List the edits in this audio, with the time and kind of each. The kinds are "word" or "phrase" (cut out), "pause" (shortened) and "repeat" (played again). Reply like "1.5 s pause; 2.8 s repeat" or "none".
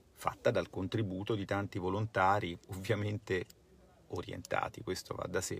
2.6 s pause